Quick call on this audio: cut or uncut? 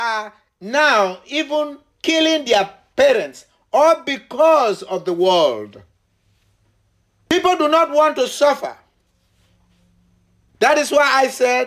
uncut